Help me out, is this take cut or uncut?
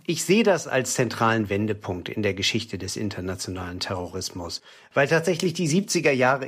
uncut